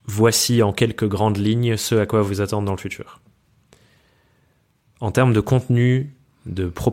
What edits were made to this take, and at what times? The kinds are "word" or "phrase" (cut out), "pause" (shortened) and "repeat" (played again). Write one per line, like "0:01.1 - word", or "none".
none